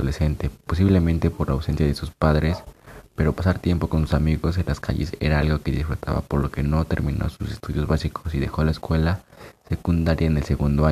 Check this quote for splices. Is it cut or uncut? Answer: uncut